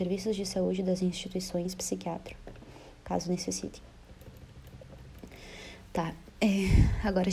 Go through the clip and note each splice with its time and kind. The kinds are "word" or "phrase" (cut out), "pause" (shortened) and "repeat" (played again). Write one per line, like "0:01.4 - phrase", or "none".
0:01.8 - phrase